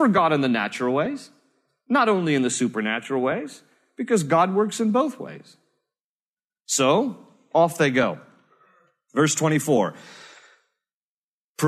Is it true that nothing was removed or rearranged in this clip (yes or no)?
yes